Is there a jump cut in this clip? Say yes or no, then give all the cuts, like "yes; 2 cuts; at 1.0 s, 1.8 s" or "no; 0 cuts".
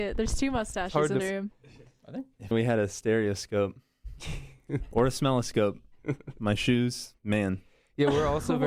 yes; 3 cuts; at 1.2 s, 2.5 s, 7.2 s